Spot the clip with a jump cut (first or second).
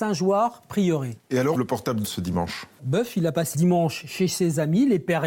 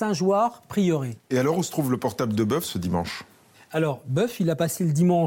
first